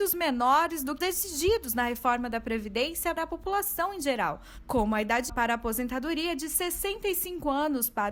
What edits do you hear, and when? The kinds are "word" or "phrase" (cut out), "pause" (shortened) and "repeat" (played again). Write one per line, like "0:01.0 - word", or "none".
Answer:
0:01.0 - word
0:03.2 - word
0:05.3 - word